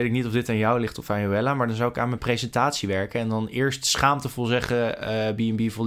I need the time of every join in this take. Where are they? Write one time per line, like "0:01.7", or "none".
none